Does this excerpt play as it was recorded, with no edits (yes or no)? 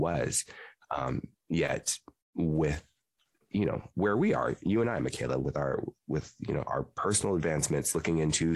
yes